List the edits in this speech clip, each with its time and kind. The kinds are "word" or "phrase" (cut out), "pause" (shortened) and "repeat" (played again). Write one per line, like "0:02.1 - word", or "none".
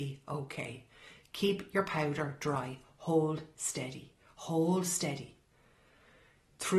none